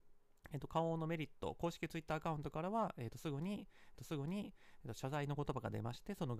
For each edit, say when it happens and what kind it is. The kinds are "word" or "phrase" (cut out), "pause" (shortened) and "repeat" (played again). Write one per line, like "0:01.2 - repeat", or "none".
0:04.0 - repeat